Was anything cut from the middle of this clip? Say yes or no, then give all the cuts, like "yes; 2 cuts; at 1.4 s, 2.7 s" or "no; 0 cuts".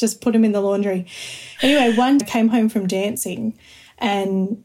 yes; 1 cut; at 2.2 s